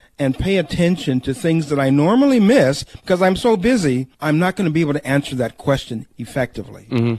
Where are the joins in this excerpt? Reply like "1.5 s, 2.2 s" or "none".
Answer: 4.1 s